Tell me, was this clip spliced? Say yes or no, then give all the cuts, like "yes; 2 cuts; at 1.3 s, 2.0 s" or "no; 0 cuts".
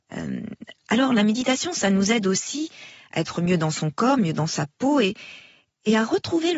no; 0 cuts